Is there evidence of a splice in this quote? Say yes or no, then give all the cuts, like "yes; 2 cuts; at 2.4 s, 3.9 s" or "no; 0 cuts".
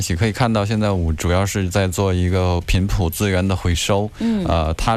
yes; 1 cut; at 1.2 s